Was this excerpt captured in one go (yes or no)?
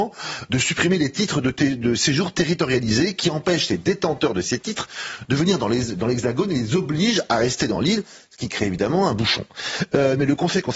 yes